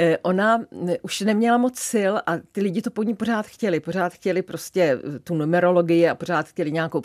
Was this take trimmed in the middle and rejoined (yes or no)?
no